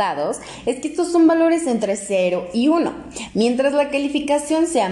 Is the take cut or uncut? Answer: uncut